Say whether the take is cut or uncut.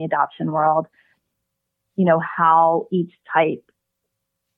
uncut